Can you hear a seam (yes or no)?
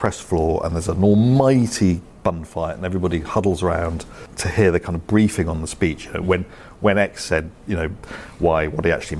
no